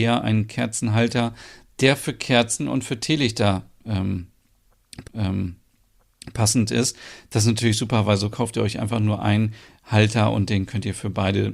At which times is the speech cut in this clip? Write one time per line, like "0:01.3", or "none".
0:05.0